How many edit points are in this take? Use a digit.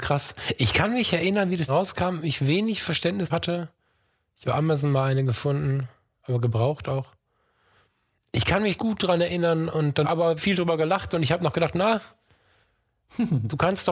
6